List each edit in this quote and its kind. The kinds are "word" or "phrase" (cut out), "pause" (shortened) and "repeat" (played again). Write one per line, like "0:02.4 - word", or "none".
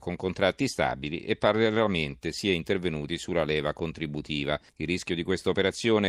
0:04.7 - pause